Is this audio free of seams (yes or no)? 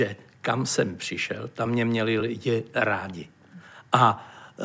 yes